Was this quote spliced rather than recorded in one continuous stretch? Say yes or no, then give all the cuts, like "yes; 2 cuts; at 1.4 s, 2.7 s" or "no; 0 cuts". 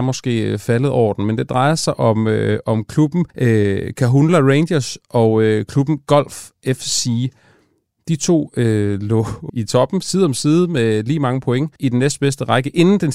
yes; 3 cuts; at 3.3 s, 9.5 s, 11.8 s